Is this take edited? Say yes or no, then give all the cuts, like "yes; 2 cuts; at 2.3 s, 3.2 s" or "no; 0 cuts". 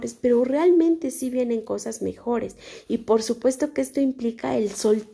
no; 0 cuts